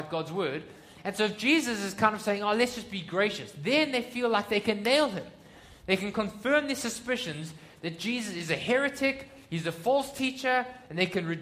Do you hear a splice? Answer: no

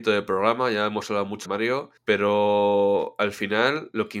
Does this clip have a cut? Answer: yes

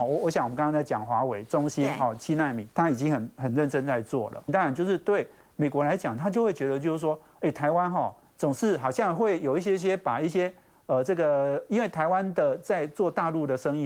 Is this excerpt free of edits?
no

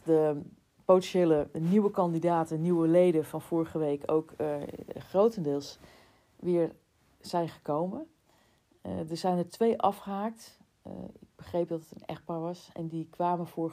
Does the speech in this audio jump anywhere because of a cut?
no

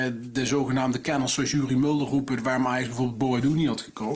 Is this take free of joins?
yes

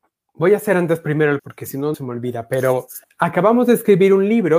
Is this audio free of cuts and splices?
no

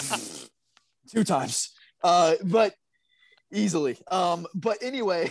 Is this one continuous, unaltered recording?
yes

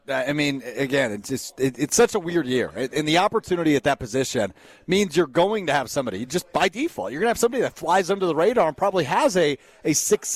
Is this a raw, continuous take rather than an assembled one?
yes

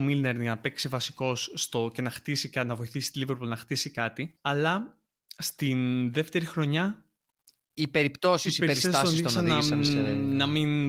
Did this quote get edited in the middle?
no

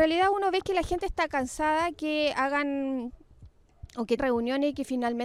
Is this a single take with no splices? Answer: no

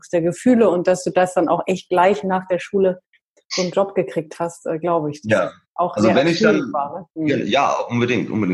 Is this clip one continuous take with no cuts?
yes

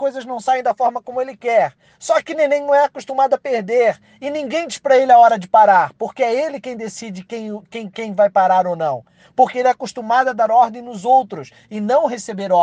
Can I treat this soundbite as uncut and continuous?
yes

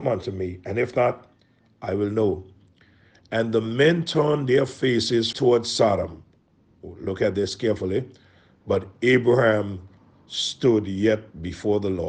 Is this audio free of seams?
no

